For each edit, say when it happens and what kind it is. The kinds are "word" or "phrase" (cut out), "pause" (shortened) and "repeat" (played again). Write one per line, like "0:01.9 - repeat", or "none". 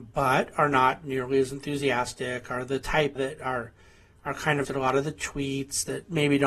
0:03.2 - word
0:04.6 - word

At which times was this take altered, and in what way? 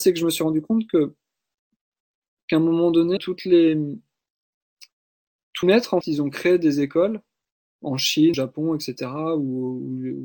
0:03.2 - word
0:05.6 - word
0:06.0 - word
0:08.3 - word

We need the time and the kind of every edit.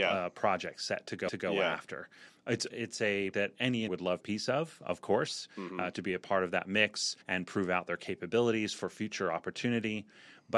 0:01.3 - repeat
0:02.7 - word
0:03.3 - word
0:03.9 - word
0:04.2 - phrase
0:07.2 - pause

